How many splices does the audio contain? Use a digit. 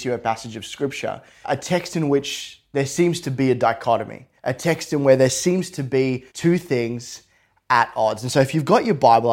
3